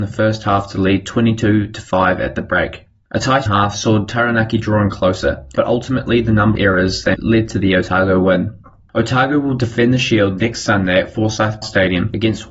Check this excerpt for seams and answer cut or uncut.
cut